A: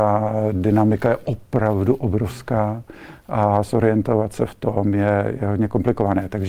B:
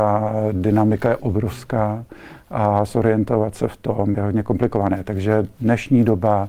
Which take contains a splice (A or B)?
B